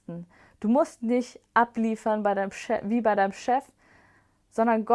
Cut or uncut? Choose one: uncut